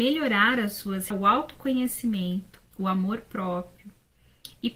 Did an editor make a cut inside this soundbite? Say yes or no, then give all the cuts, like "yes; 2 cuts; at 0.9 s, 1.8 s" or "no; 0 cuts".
yes; 2 cuts; at 1.1 s, 2.7 s